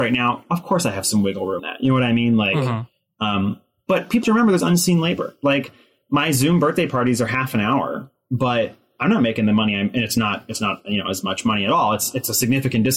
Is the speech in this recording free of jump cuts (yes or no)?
no